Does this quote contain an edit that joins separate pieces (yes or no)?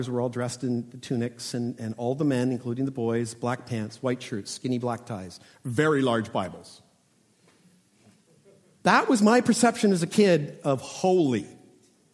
no